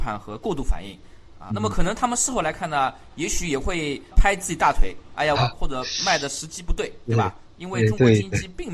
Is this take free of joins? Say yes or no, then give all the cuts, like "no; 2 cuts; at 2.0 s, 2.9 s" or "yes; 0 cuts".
no; 2 cuts; at 1.5 s, 5.4 s